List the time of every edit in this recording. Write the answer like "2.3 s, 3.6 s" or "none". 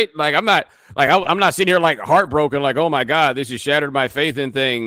none